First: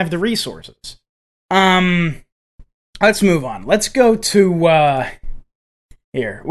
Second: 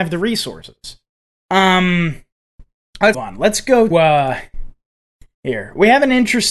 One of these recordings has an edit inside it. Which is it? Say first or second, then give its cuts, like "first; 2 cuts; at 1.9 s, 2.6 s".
second; 2 cuts; at 3.1 s, 3.9 s